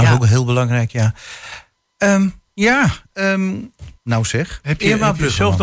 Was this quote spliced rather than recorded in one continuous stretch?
yes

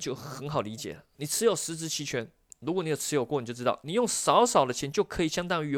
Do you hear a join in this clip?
no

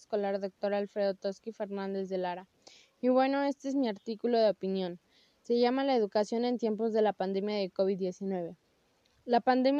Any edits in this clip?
no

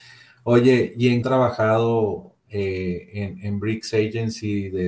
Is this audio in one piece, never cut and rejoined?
no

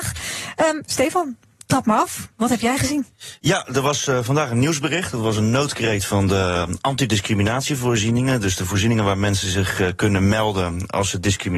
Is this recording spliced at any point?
no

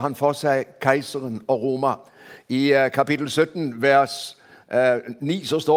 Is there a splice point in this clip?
no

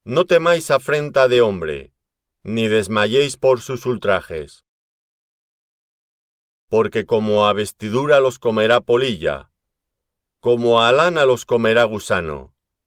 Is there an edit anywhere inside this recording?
no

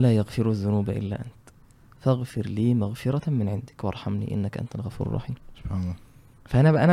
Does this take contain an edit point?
no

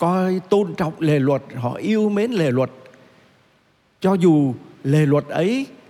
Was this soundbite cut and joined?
no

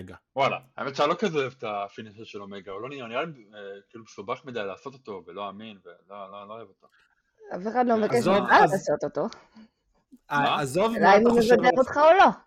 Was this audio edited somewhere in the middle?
no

